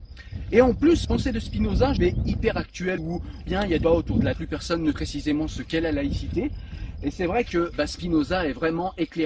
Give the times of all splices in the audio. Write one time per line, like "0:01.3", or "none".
0:01.0
0:02.0
0:03.0
0:03.5
0:03.8
0:04.3
0:04.9
0:07.7